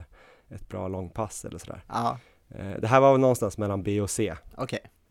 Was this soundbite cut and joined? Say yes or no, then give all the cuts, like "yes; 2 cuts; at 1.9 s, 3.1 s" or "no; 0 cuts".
no; 0 cuts